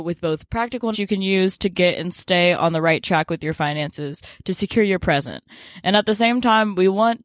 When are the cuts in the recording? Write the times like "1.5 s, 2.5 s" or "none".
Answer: 0.9 s